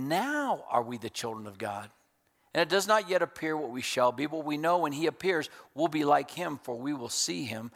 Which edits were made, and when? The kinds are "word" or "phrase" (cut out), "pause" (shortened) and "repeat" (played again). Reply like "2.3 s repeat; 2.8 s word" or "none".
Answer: none